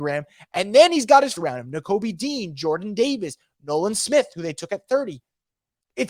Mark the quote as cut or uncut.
cut